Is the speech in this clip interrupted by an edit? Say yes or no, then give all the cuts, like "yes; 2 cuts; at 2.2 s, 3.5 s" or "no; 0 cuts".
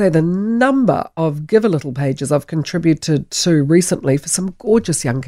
no; 0 cuts